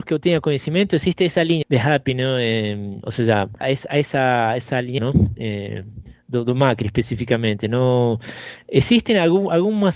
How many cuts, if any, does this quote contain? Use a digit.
3